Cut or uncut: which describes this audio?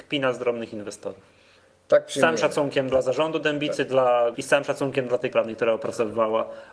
cut